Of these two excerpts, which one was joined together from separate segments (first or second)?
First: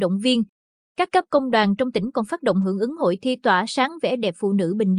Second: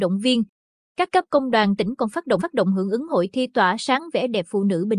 second